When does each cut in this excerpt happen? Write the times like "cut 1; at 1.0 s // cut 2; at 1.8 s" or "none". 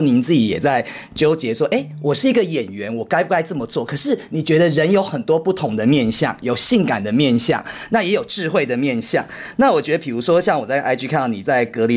none